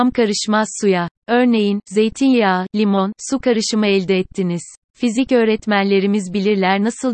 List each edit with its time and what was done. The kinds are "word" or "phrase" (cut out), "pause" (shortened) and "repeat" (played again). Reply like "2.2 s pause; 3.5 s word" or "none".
4.8 s pause